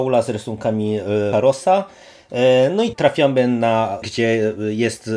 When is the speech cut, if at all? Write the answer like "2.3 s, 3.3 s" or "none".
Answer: 1.3 s, 2.9 s, 4.0 s